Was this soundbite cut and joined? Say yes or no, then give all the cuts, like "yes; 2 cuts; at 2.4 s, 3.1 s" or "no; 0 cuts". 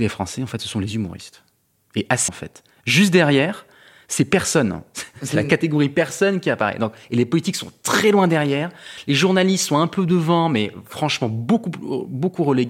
yes; 1 cut; at 2.3 s